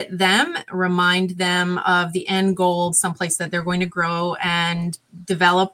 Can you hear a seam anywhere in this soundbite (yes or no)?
yes